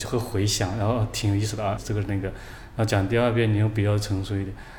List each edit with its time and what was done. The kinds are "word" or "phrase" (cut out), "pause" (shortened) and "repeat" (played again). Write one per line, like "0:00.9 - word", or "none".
0:01.8 - word